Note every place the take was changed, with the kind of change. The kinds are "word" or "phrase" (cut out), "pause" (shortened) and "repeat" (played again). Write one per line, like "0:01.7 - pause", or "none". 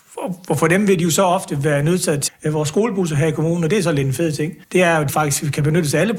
0:02.3 - phrase
0:04.6 - pause
0:05.1 - word